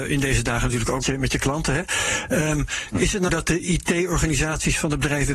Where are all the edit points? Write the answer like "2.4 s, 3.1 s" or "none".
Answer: 1.0 s, 3.3 s